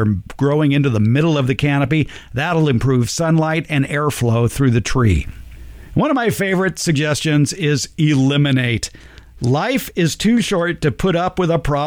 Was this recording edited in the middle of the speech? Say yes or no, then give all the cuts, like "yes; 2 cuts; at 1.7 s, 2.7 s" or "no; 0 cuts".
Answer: no; 0 cuts